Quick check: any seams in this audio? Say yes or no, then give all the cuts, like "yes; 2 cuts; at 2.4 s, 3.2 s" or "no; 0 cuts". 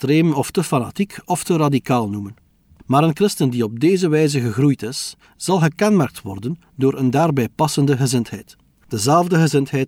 no; 0 cuts